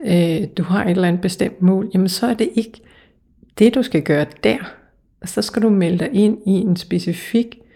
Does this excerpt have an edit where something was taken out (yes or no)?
no